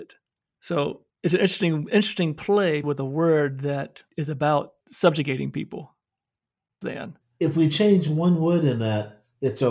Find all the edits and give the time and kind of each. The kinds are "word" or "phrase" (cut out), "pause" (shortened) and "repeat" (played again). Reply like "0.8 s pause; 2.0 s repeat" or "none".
1.1 s pause; 2.8 s word; 4.1 s pause; 4.8 s pause; 6.8 s phrase